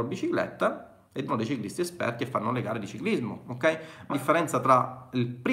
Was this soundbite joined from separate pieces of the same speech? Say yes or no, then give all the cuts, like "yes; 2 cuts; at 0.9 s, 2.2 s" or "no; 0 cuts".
yes; 2 cuts; at 1.3 s, 4.1 s